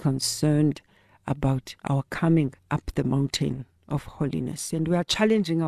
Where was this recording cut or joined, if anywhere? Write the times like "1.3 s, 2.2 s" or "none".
1.8 s, 2.6 s